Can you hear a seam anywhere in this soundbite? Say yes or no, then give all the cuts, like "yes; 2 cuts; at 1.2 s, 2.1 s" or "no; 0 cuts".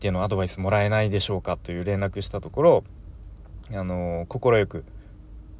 no; 0 cuts